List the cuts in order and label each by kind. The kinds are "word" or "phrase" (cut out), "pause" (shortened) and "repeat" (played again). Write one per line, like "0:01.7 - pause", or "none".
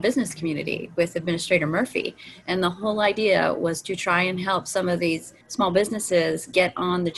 0:05.4 - pause